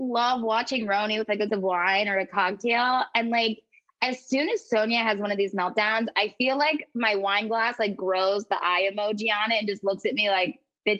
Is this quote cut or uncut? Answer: cut